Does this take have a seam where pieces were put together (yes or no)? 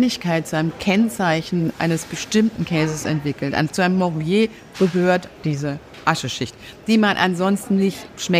yes